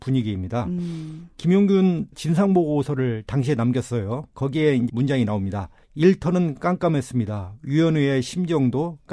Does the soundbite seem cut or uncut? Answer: cut